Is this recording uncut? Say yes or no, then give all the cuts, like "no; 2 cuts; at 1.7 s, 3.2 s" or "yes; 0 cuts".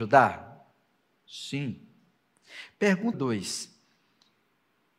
no; 1 cut; at 3.1 s